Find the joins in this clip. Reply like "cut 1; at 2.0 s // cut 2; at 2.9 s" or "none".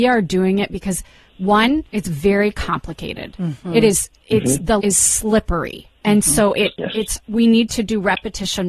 cut 1; at 1.9 s // cut 2; at 4.8 s // cut 3; at 7.2 s